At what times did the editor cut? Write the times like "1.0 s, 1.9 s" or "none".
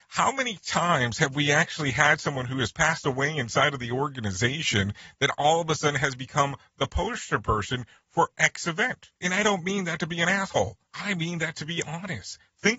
9.2 s, 10.9 s